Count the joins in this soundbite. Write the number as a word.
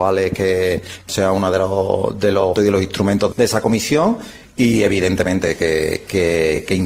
three